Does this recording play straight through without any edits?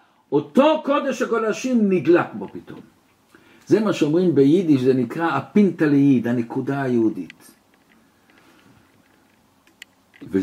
yes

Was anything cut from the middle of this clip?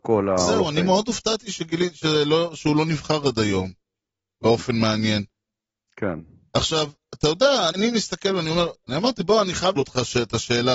yes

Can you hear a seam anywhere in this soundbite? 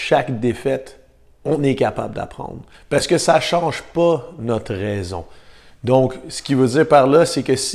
yes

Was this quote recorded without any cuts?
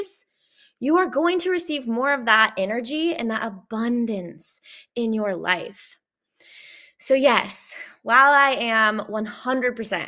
yes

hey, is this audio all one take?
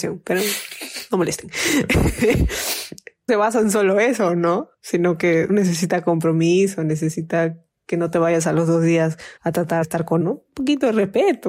no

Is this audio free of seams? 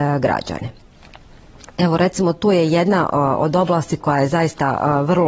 yes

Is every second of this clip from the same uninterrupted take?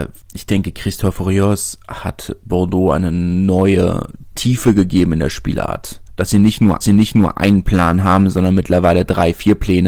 no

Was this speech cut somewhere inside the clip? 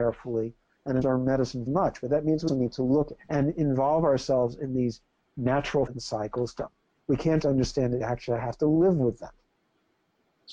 yes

